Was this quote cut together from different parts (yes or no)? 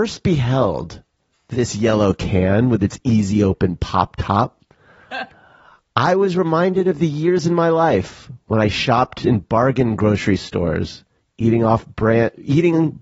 yes